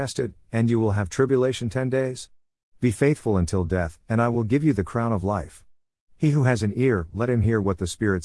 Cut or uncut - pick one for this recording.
uncut